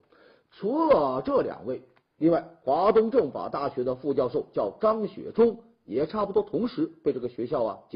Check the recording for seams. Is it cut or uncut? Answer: uncut